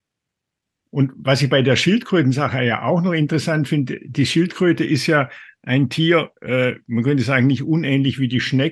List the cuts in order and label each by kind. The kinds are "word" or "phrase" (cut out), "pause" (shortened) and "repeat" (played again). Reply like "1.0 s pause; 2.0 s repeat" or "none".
6.4 s pause